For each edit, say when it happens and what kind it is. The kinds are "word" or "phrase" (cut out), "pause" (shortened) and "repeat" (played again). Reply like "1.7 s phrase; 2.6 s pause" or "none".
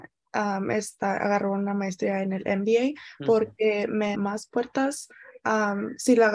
4.1 s word

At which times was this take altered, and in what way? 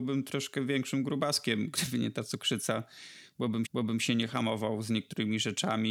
3.6 s repeat

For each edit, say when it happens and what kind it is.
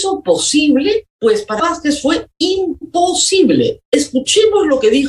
1.1 s pause; 1.6 s word; 3.9 s pause

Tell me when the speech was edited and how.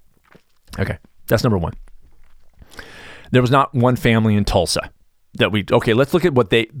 none

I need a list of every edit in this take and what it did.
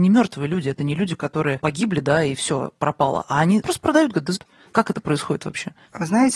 3.6 s word; 4.4 s phrase

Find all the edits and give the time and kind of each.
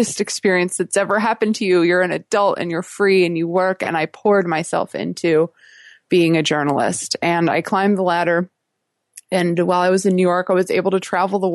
none

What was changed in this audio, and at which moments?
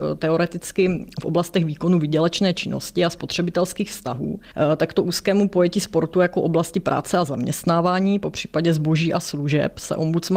none

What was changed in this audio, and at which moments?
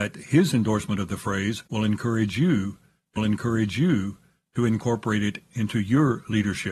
1.7 s pause; 3.2 s repeat

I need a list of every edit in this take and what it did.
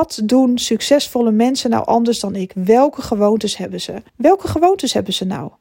4.1 s pause

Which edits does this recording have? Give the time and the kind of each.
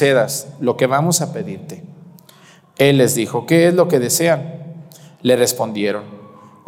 none

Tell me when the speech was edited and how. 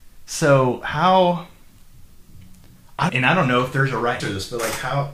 3.1 s word; 4.2 s word

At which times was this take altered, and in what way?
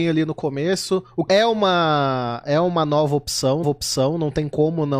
1.3 s word; 3.6 s repeat

